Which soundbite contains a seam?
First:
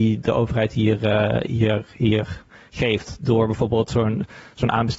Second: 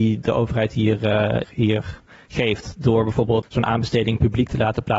second; 2 cuts; at 1.4 s, 3.4 s

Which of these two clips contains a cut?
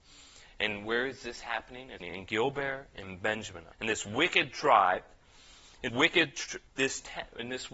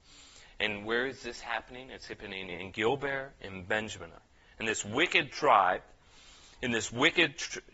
first; 4 cuts; at 2.0 s, 3.7 s, 5.9 s, 6.7 s

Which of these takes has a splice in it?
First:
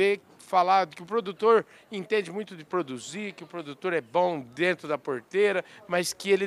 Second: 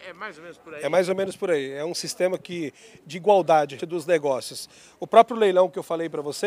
second; 1 cut; at 3.8 s

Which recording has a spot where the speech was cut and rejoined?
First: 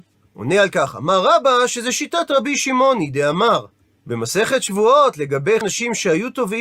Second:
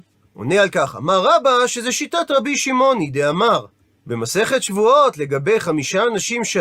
first; 1 cut; at 5.6 s

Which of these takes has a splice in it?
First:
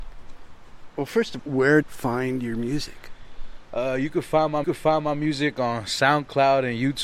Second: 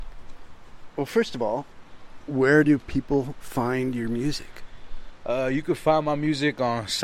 first; 3 cuts; at 1.4 s, 1.8 s, 4.6 s

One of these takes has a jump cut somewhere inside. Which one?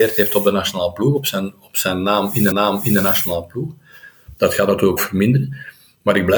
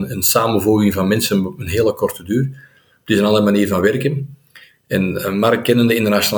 first; 2 cuts; at 2.5 s, 5.0 s

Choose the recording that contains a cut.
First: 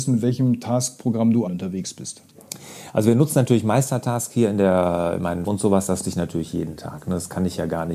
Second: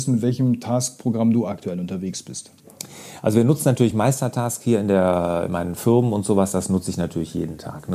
first; 3 cuts; at 1.5 s, 5.5 s, 6.0 s

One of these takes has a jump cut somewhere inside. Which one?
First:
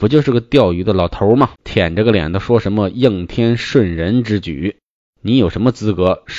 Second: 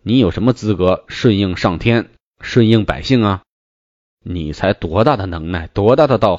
first; 1 cut; at 1.6 s

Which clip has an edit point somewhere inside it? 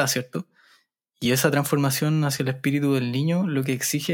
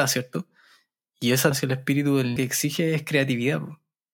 second; 2 cuts; at 1.5 s, 2.4 s

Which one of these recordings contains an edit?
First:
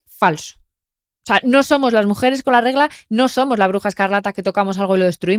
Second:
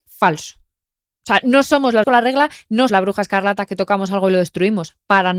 second; 2 cuts; at 2.0 s, 2.9 s

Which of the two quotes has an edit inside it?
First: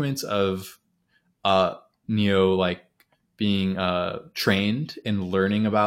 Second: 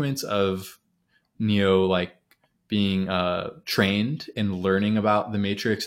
second; 1 cut; at 1.2 s

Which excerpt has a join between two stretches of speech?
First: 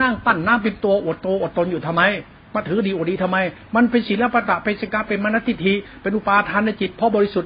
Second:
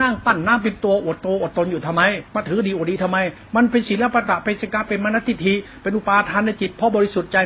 second; 1 cut; at 2.3 s

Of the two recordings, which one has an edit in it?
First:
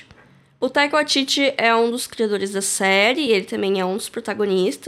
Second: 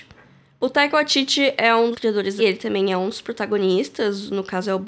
second; 2 cuts; at 1.9 s, 2.4 s

